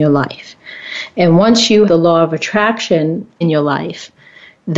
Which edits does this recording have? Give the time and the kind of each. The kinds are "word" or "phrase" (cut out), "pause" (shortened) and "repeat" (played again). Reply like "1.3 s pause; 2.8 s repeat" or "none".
1.9 s word; 3.4 s word